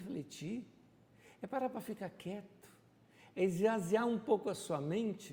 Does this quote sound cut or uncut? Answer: uncut